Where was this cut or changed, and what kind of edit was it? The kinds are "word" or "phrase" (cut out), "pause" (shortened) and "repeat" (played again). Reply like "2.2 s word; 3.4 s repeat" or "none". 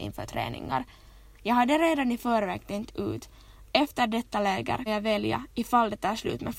4.9 s word

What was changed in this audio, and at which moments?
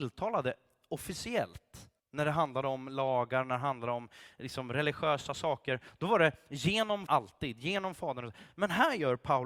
2.0 s pause; 7.1 s word

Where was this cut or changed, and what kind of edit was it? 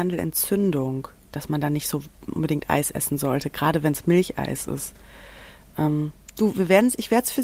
none

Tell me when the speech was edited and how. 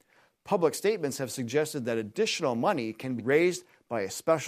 3.2 s word

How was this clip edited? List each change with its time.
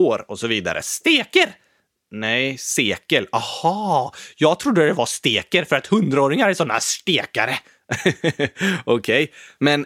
none

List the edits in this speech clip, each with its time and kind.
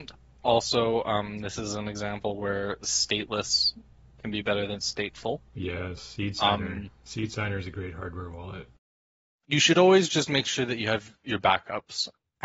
none

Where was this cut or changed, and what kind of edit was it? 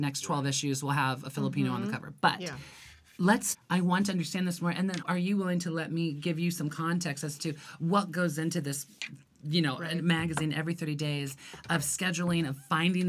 3.5 s word; 5.0 s word

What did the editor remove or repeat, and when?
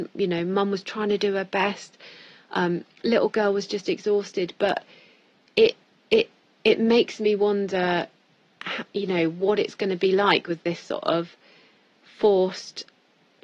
none

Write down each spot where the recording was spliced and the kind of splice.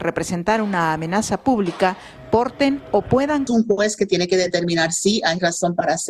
3.5 s phrase

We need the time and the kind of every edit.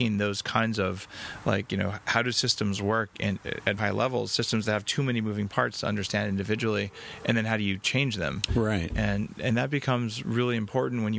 3.8 s word

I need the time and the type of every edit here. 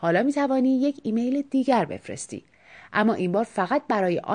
none

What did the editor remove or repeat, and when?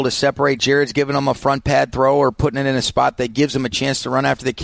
none

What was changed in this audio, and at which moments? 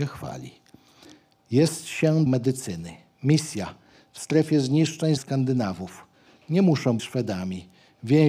2.3 s word; 5.2 s word; 7.0 s word

